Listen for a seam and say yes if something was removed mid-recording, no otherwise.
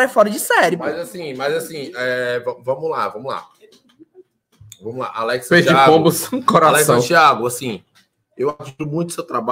no